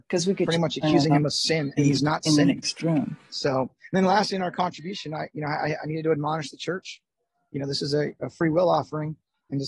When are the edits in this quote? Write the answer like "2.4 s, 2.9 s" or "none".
none